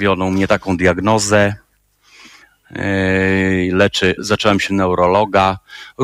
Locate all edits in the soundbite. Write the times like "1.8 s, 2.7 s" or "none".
4.2 s, 4.7 s